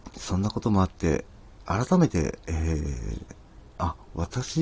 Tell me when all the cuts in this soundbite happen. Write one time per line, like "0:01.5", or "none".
0:03.7